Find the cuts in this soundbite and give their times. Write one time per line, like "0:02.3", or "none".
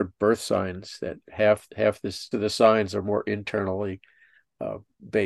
0:01.7
0:02.3